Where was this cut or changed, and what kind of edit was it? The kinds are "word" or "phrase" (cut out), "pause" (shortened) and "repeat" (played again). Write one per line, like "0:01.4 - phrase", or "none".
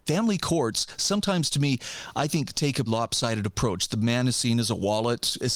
0:02.9 - word